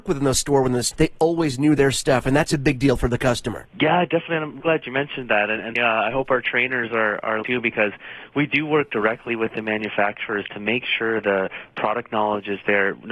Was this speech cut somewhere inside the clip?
yes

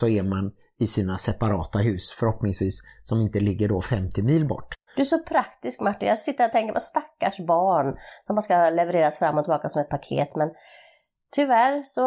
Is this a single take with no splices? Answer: yes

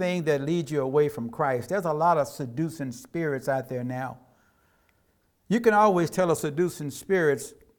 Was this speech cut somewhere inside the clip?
no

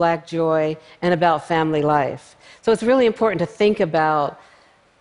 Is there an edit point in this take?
no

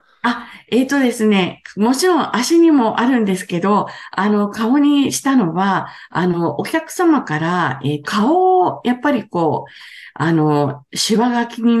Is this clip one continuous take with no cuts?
no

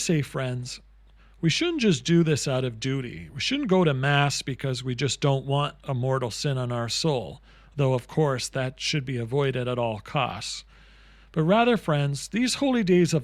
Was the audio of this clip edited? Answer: no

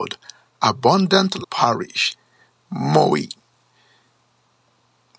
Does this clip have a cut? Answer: yes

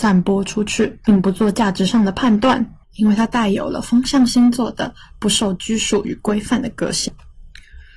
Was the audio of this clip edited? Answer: yes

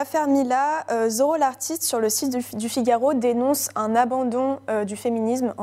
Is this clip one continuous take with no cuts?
yes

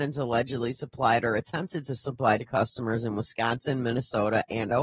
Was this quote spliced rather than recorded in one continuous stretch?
yes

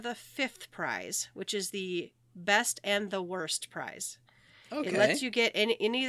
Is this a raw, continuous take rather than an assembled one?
yes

